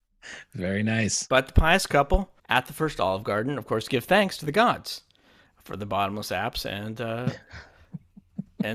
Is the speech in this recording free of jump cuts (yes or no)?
no